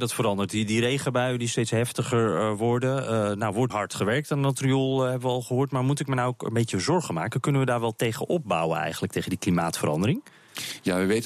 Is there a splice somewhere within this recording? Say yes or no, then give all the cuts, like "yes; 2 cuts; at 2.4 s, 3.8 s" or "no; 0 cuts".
yes; 1 cut; at 3.7 s